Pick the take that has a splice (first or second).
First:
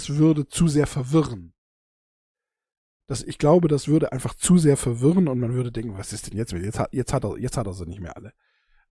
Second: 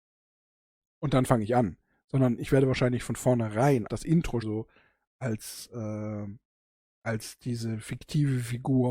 second